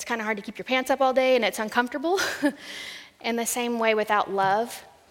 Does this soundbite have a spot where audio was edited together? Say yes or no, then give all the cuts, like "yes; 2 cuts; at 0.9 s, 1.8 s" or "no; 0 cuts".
no; 0 cuts